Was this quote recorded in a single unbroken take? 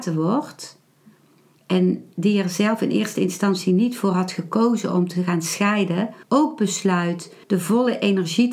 no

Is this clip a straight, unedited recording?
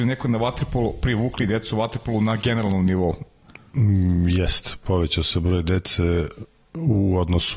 yes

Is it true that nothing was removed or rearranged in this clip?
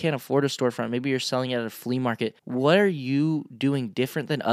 no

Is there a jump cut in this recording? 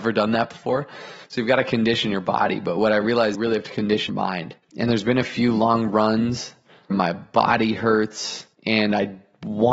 yes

